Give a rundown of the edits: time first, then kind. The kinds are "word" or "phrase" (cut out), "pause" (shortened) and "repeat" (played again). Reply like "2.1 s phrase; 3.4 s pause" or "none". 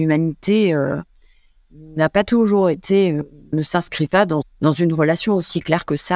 3.5 s word; 4.4 s word